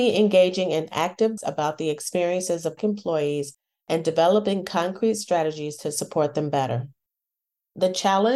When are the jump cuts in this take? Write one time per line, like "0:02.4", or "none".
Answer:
0:01.4
0:02.8